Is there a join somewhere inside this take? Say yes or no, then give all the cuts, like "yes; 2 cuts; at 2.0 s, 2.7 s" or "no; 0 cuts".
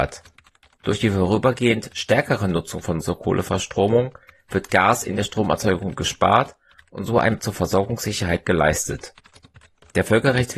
yes; 2 cuts; at 3.0 s, 7.4 s